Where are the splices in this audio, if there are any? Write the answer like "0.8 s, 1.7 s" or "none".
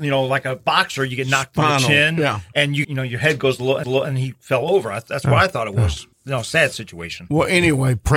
2.8 s, 3.8 s, 6.1 s